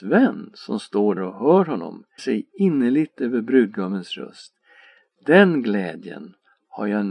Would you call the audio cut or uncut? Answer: cut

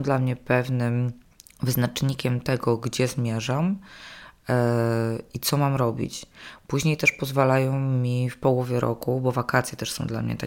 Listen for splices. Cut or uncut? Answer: cut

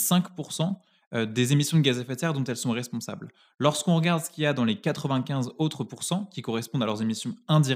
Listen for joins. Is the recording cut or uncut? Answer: uncut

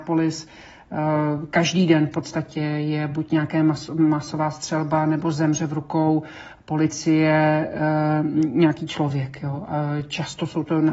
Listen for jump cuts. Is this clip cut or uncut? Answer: uncut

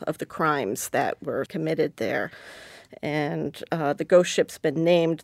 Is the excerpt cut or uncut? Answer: cut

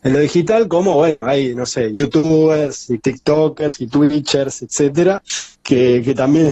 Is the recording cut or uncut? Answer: uncut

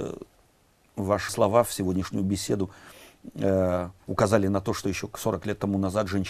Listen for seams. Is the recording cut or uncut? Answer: cut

